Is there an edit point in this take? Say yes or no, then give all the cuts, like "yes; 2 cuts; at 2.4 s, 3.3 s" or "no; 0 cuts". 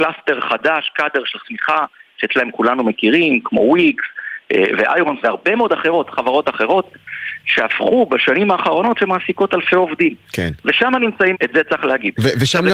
yes; 6 cuts; at 1.4 s, 2.3 s, 5.2 s, 6.1 s, 8.9 s, 11.3 s